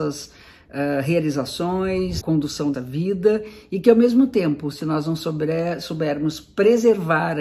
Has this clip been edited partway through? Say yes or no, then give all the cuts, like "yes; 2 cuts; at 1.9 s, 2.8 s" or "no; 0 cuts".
yes; 2 cuts; at 2.2 s, 2.7 s